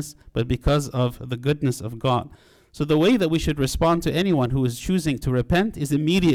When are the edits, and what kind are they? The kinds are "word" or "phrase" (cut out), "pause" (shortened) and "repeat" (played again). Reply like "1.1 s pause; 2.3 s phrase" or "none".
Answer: none

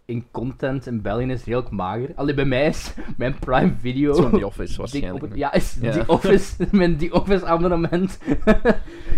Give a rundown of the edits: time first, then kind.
none

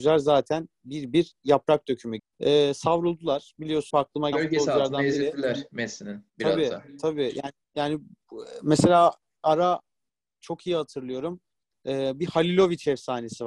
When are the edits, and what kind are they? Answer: 2.2 s word; 3.9 s phrase; 4.3 s word; 6.3 s pause; 7.6 s pause; 9.4 s word

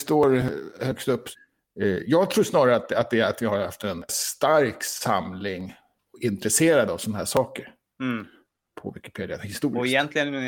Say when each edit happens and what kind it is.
4.1 s word

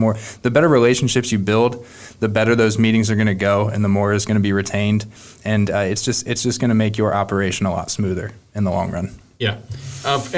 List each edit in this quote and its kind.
none

